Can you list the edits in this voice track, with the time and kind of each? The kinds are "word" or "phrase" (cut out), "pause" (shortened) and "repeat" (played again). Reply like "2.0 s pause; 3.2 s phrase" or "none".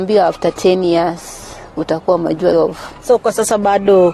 2.5 s phrase